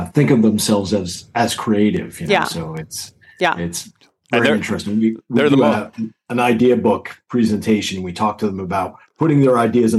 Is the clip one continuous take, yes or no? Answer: yes